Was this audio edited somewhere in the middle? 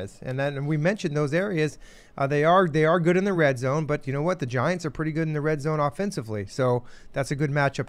no; 0 cuts

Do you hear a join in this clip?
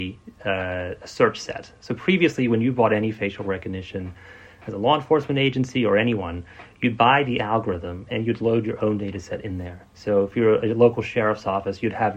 yes; 1 cut; at 9.9 s

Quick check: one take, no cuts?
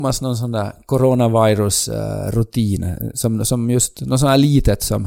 yes; 0 cuts

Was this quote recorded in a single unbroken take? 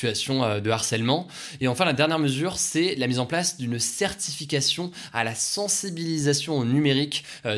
yes; 0 cuts

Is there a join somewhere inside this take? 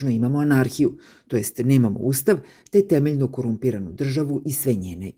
no; 0 cuts

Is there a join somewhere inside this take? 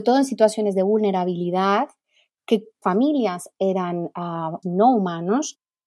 yes; 2 cuts; at 2.8 s, 4.6 s

